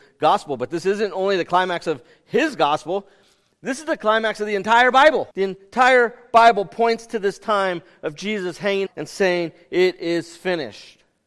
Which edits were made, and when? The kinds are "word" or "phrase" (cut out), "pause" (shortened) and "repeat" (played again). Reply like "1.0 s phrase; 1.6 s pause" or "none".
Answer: 5.3 s pause; 8.9 s phrase

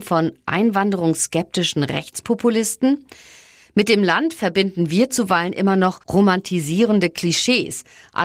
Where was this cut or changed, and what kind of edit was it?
6.0 s pause

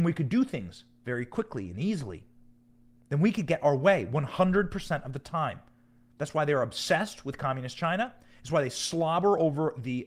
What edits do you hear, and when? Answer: none

